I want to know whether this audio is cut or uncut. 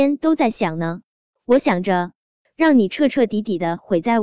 uncut